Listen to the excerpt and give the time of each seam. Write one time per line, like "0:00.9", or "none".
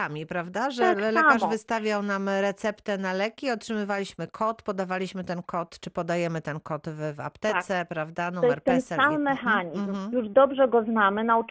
none